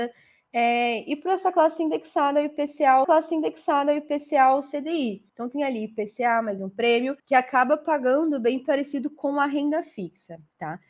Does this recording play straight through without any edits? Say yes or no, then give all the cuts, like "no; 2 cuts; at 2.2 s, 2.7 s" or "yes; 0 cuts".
no; 4 cuts; at 3.0 s, 5.3 s, 6.6 s, 7.2 s